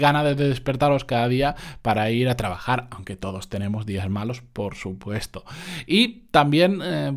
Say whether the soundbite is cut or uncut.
uncut